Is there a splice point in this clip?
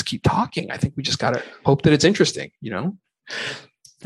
no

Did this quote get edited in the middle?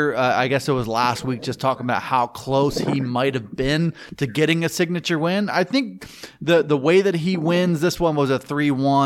no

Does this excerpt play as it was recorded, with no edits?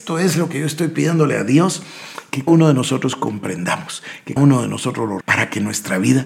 no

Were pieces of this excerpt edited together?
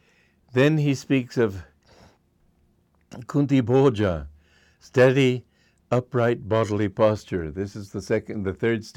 no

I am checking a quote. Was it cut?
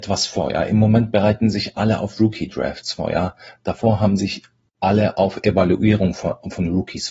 no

